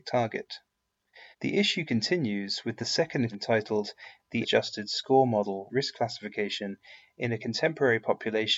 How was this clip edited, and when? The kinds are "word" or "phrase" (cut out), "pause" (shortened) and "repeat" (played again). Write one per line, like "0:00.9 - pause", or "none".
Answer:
0:01.3 - pause
0:03.3 - phrase
0:04.4 - word
0:05.7 - phrase